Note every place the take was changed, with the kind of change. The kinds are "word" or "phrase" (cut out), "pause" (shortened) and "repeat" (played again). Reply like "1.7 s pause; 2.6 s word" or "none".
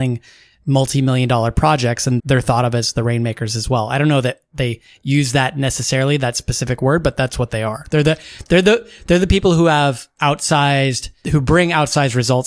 2.2 s word; 11.2 s word